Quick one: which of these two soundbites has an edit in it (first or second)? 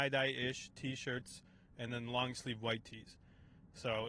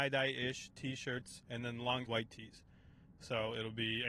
second